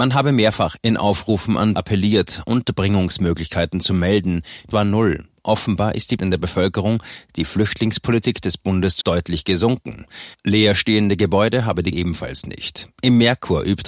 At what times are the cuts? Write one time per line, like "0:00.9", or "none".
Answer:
0:01.8
0:04.7
0:06.2
0:09.0
0:11.9